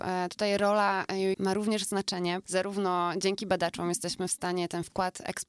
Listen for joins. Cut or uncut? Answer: cut